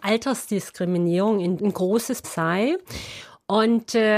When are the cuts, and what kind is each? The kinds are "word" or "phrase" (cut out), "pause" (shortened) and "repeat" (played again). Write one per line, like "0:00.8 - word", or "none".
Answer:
0:01.6 - word
0:02.2 - word